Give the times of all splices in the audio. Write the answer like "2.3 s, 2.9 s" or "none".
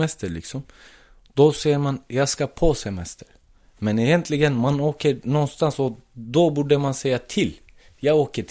none